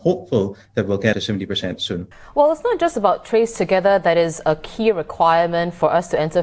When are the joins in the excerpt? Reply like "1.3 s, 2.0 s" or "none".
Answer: 1.1 s, 2.1 s